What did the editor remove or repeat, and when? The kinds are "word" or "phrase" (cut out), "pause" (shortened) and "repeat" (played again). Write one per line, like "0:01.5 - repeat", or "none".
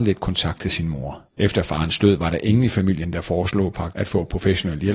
0:01.3 - pause
0:03.9 - word